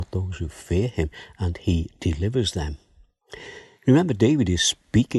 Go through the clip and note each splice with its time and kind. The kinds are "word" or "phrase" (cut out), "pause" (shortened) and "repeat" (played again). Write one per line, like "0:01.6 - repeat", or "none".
none